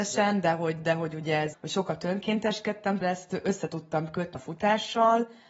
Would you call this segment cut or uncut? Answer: cut